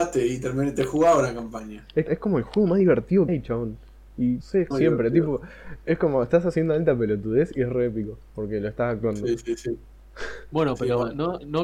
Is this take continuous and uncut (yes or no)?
no